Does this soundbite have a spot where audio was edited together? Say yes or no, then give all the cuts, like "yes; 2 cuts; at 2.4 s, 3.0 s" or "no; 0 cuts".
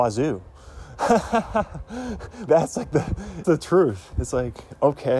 yes; 2 cuts; at 2.5 s, 3.4 s